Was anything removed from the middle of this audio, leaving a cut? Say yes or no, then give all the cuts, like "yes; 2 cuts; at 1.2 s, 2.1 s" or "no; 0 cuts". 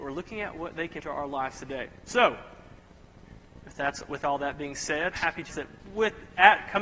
yes; 3 cuts; at 1.0 s, 5.1 s, 5.5 s